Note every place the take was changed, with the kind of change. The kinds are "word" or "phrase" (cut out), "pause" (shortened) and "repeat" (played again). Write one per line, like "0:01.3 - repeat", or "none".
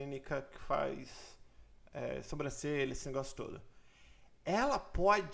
none

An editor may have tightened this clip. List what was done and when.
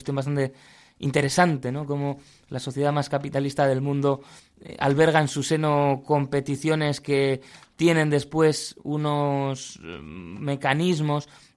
none

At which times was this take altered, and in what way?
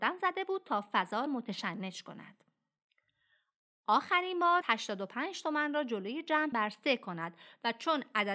0:01.3 - word
0:04.6 - word
0:06.5 - word

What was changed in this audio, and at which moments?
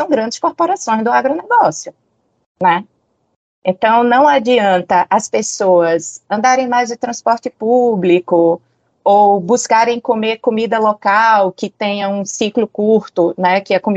none

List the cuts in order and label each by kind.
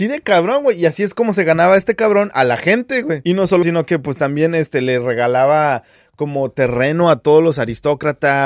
0:03.6 - word

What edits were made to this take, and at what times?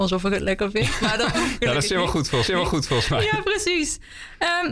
0:01.3 - word
0:02.5 - repeat

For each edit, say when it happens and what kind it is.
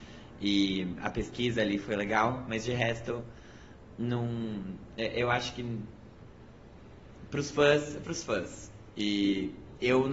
0:01.8 - word
0:08.0 - word

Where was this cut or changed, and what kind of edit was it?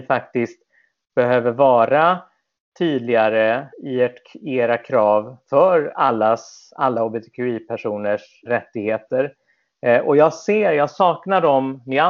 0:03.7 - pause
0:08.5 - word

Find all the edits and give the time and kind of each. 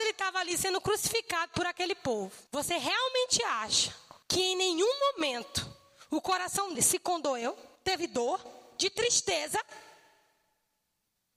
0:02.5 - pause
0:04.2 - pause
0:06.7 - word
0:07.8 - pause

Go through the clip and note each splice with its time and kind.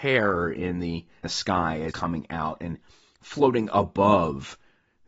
0:01.2 - word
0:01.9 - word

